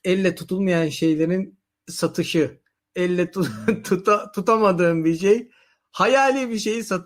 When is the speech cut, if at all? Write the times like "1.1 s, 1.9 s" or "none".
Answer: none